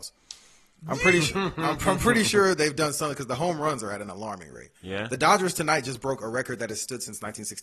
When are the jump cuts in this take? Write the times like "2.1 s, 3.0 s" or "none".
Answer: 4.8 s